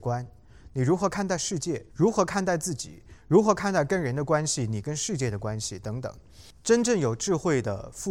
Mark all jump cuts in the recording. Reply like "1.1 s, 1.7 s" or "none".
1.9 s